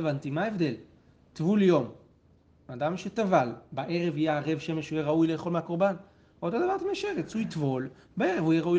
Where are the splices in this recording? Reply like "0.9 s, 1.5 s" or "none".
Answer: none